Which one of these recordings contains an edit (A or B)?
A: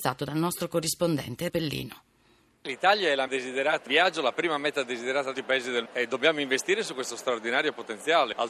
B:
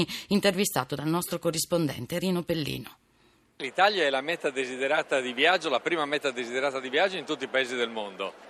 A